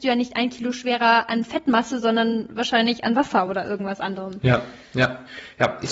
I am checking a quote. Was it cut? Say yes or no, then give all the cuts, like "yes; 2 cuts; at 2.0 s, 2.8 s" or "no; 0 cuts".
no; 0 cuts